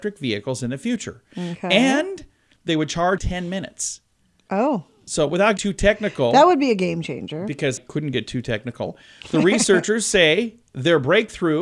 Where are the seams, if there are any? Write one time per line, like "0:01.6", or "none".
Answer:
0:03.2
0:05.6
0:07.8

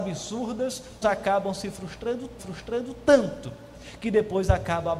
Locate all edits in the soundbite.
0:01.0
0:02.4

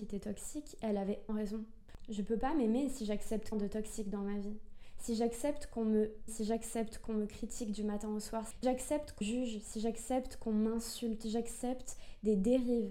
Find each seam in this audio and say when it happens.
0:01.3
0:03.5
0:06.3
0:08.6
0:09.2
0:11.2

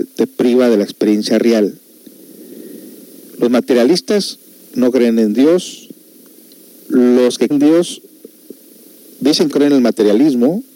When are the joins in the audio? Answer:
0:07.5
0:09.5

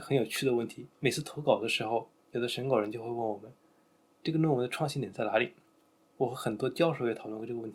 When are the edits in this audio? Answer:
0:00.9

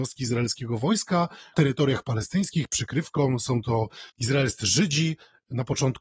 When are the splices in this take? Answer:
0:01.5
0:02.7
0:04.1

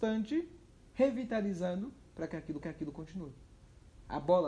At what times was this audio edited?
0:02.6

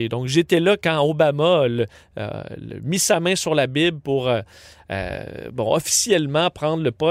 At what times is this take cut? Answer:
none

